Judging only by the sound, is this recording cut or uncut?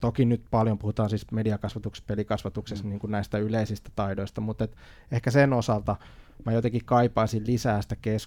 uncut